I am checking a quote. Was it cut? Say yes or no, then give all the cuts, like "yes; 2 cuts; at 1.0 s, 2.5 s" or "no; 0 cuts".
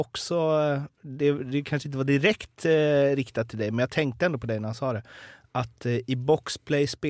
no; 0 cuts